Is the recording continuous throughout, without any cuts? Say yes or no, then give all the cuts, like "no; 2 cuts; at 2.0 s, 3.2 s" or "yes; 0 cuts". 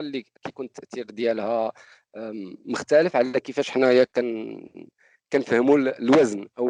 yes; 0 cuts